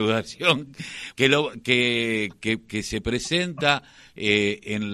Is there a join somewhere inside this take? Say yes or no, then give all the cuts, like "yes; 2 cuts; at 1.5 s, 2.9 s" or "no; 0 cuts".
yes; 1 cut; at 1.1 s